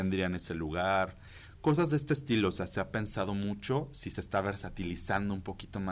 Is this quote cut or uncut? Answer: uncut